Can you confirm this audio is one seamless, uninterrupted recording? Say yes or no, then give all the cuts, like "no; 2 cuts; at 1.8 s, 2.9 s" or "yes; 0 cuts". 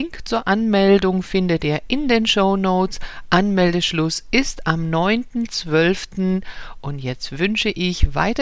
yes; 0 cuts